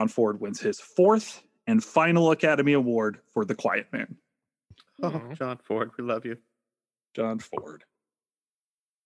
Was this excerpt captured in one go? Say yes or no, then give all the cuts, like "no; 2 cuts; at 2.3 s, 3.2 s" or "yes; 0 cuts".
yes; 0 cuts